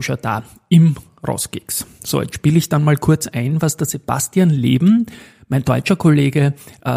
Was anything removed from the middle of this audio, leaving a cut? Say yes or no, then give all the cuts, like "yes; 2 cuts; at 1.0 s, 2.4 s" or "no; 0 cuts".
no; 0 cuts